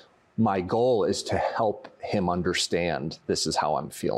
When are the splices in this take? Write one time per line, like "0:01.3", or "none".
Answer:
none

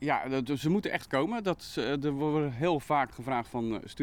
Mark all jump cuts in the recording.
none

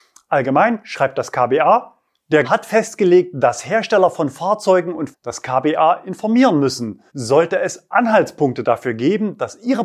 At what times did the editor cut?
0:02.4
0:05.1
0:07.1

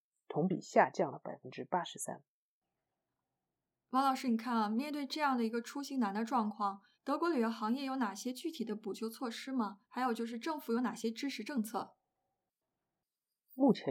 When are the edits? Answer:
0:06.9
0:09.8

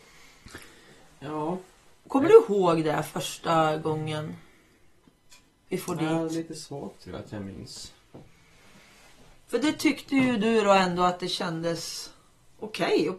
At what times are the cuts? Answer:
none

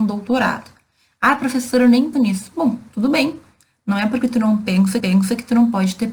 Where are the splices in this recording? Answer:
0:02.1
0:05.0

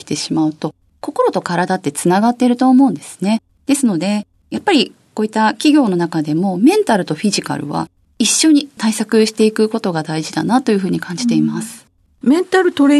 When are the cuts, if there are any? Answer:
none

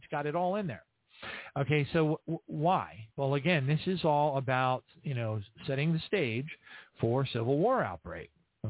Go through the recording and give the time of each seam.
0:03.1

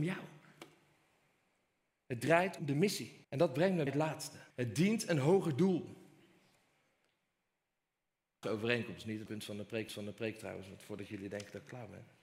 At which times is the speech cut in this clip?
0:02.6
0:03.2
0:03.9
0:04.5
0:08.4
0:09.3
0:09.9

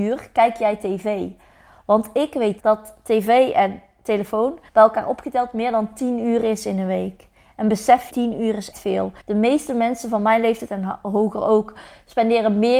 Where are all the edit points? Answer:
0:02.6
0:04.7
0:08.1
0:08.7
0:09.2

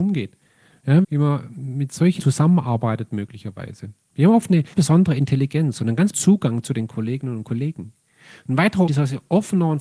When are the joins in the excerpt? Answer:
0:01.0
0:02.2
0:04.7
0:06.1
0:08.9

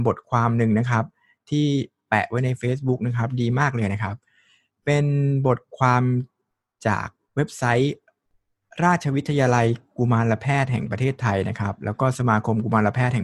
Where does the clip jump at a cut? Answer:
none

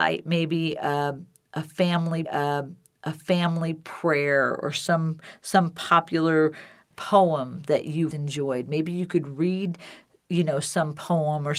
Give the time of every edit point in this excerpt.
0:02.2
0:06.9
0:08.1

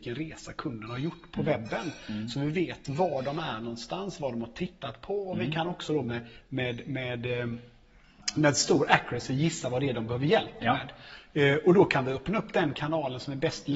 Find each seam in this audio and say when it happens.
none

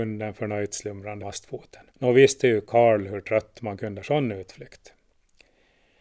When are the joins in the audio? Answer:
0:01.2
0:01.9
0:04.0

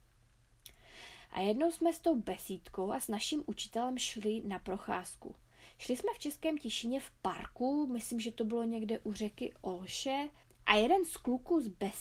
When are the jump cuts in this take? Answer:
0:10.4

